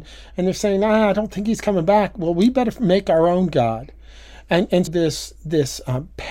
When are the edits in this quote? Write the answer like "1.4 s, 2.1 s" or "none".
4.9 s